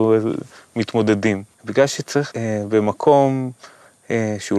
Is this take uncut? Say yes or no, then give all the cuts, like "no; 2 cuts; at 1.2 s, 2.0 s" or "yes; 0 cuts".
no; 2 cuts; at 1.5 s, 2.3 s